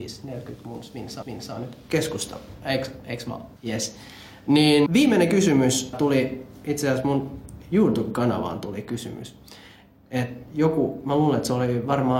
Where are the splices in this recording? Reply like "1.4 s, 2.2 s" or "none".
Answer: 1.2 s, 3.6 s, 4.9 s, 5.9 s